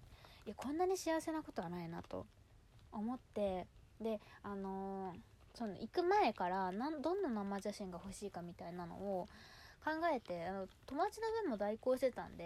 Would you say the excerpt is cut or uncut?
cut